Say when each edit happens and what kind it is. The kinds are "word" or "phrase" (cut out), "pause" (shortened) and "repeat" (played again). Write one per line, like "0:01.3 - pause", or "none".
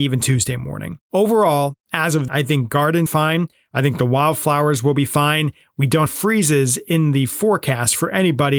0:01.0 - pause
0:02.3 - phrase
0:03.1 - word
0:06.1 - phrase